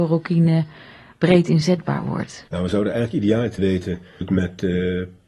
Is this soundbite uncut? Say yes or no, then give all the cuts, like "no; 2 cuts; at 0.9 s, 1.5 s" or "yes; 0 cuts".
no; 3 cuts; at 2.5 s, 3.6 s, 4.2 s